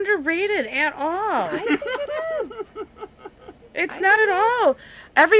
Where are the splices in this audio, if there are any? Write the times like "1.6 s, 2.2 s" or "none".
none